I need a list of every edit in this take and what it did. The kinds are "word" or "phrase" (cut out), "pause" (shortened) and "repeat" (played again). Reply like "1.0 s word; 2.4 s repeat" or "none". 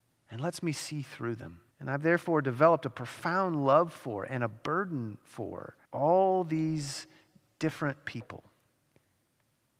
1.7 s pause; 5.8 s pause